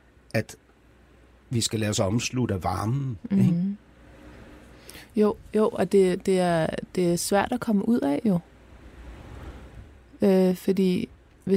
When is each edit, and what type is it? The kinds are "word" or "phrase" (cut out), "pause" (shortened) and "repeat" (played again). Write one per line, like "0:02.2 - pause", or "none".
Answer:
none